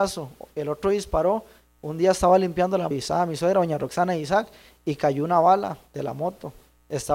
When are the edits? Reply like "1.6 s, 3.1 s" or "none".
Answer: 2.9 s